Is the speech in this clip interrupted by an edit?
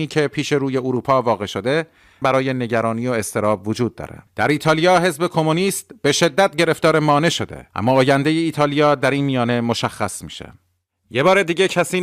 yes; 3 cuts; at 2.2 s, 4.3 s, 7.7 s

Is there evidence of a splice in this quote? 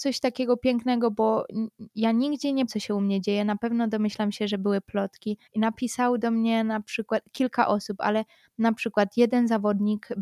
yes; 2 cuts; at 2.7 s, 5.5 s

